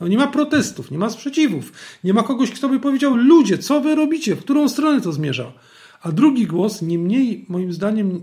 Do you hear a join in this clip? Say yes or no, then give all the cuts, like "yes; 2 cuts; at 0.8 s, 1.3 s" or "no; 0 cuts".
no; 0 cuts